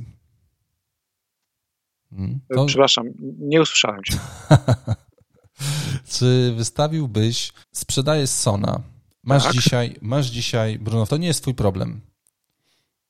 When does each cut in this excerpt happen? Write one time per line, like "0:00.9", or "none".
0:02.5
0:07.6
0:09.1
0:11.1

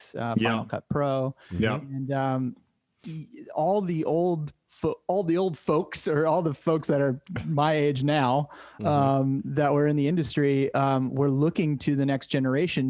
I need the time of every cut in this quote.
none

